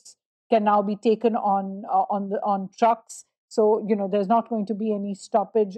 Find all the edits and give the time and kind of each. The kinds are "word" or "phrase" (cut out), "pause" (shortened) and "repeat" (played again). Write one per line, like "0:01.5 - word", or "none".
none

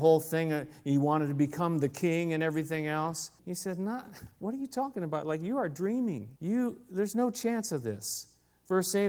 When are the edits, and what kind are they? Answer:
0:03.4 - pause
0:06.4 - pause

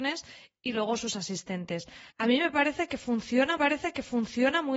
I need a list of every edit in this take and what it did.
0:02.1 - pause
0:03.6 - repeat

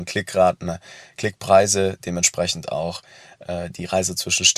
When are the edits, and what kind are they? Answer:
none

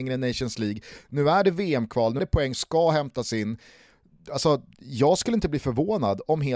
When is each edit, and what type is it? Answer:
0:02.2 - word
0:02.5 - word

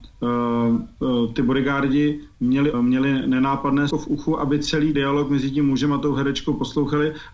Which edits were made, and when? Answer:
0:02.7 - phrase
0:03.9 - word
0:04.9 - word

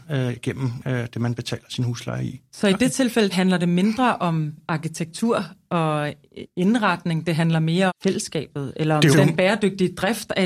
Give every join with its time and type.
0:03.3 - word
0:07.9 - word
0:09.1 - word

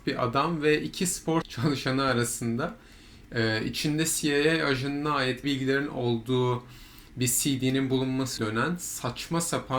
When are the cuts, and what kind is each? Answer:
0:01.4 - word
0:05.4 - word
0:08.4 - word

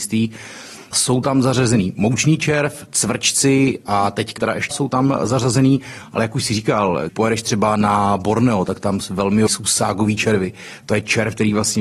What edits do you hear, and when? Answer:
0:00.9 - word
0:04.4 - word
0:04.7 - word
0:07.1 - word
0:09.5 - word

